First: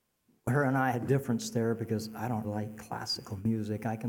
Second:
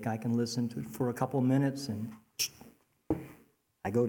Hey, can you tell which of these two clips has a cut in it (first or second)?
first